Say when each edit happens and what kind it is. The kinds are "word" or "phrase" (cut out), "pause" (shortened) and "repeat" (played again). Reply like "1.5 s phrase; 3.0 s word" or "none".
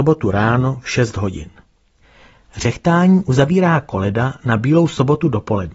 none